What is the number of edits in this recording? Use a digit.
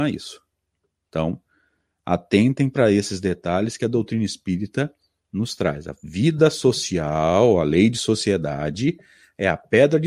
0